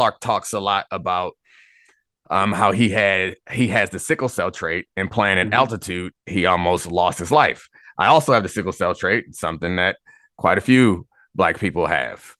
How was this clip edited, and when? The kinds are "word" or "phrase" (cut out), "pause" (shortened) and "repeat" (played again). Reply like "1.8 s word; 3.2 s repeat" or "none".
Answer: none